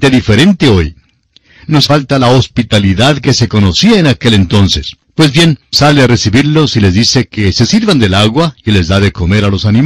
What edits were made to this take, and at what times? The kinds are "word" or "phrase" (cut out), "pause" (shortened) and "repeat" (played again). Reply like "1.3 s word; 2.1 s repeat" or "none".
1.9 s word; 5.0 s pause; 5.7 s word